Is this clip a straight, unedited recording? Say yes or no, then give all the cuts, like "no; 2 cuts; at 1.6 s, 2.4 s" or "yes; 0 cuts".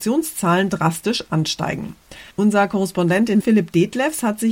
no; 2 cuts; at 2.3 s, 3.4 s